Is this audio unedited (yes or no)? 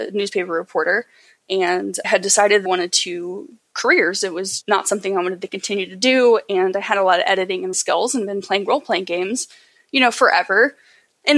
no